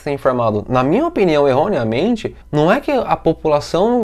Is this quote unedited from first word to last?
no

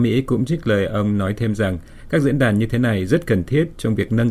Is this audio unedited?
yes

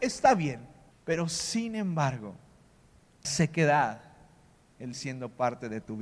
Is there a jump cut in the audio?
yes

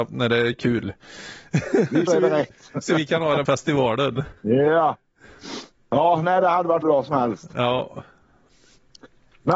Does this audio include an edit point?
yes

